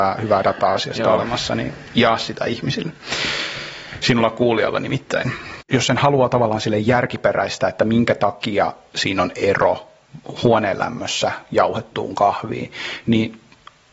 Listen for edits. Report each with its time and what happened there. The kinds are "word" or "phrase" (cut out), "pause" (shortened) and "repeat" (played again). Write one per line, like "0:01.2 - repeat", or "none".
none

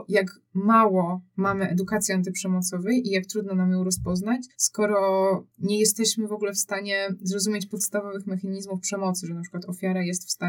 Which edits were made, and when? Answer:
0:04.5 - pause

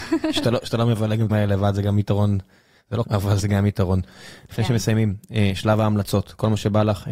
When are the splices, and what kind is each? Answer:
0:01.3 - word
0:03.0 - word
0:03.4 - word

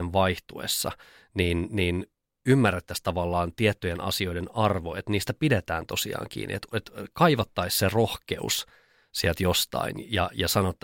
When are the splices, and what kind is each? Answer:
none

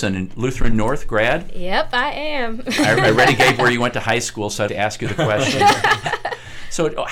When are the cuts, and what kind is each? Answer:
0:04.7 - phrase

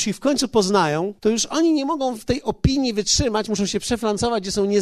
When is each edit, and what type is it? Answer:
0:01.2 - pause

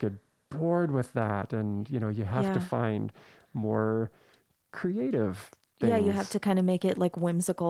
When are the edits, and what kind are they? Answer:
none

